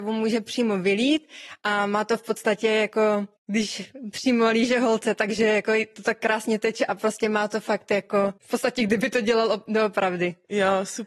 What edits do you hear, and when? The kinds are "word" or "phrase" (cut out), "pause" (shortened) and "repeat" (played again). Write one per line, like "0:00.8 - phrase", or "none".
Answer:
0:03.4 - pause
0:08.4 - pause